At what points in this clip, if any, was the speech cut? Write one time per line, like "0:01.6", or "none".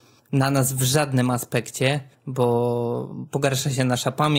0:02.1